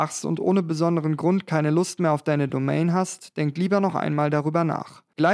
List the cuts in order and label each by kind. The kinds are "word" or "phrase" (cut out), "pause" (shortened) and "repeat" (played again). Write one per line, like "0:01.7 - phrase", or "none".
none